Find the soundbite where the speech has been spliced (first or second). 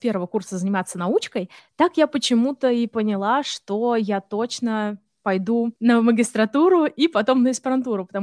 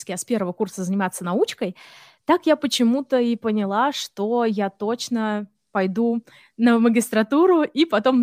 first